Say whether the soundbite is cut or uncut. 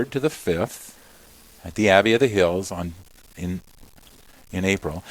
uncut